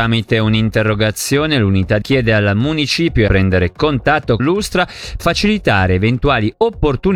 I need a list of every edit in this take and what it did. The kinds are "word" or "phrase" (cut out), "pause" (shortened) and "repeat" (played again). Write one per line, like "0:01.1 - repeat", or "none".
0:02.0 - word
0:03.3 - phrase
0:04.4 - word
0:05.2 - word